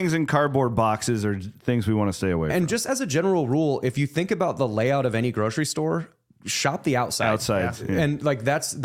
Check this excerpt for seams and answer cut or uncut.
uncut